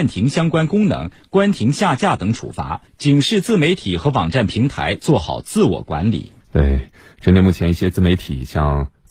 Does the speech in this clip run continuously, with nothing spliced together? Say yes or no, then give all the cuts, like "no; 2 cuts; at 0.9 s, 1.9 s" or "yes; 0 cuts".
no; 2 cuts; at 2.9 s, 6.4 s